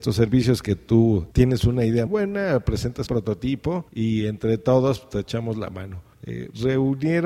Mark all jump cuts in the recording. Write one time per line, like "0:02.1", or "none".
0:01.3
0:02.1
0:03.1
0:03.9
0:06.1

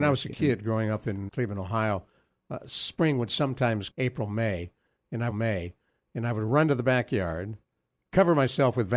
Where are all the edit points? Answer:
0:01.3
0:03.9
0:05.3

